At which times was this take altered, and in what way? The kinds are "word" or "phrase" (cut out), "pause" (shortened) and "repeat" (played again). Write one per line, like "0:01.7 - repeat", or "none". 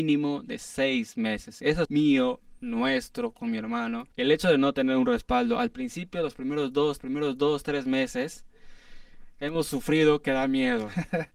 0:01.9 - phrase
0:04.1 - pause
0:07.0 - repeat